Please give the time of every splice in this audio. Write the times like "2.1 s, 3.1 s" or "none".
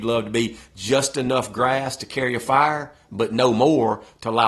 none